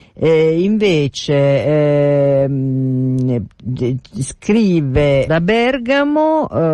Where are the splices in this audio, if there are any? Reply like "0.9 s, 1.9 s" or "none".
5.3 s